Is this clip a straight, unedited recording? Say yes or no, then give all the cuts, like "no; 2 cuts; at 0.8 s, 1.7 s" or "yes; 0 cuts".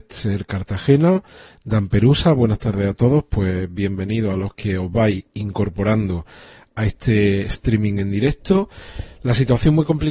yes; 0 cuts